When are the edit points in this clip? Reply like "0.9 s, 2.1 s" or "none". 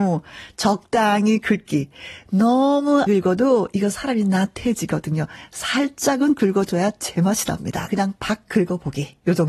3.1 s, 7.9 s

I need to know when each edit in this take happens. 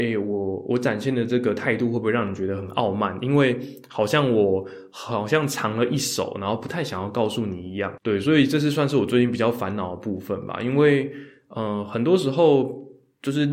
none

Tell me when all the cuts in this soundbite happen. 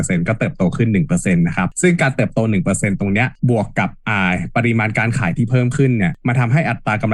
3.4 s

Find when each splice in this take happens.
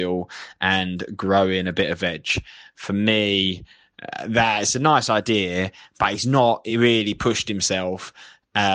none

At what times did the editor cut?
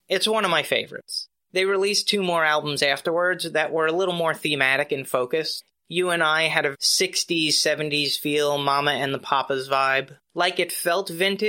6.7 s

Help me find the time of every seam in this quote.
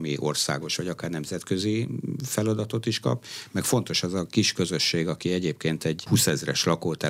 none

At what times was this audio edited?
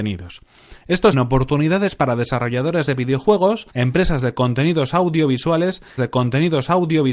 1.1 s, 3.7 s, 6.0 s

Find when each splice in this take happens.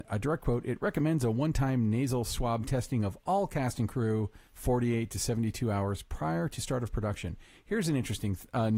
none

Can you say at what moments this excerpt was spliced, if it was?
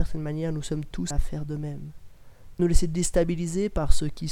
1.1 s, 2.6 s

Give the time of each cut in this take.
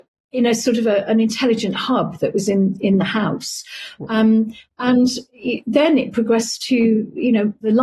none

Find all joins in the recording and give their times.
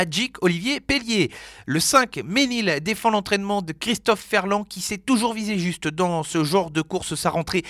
none

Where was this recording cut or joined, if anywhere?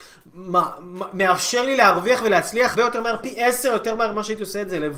2.7 s

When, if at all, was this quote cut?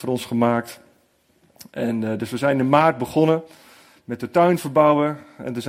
none

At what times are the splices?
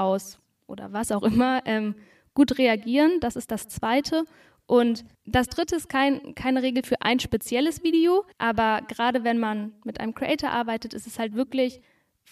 5.1 s, 8.3 s

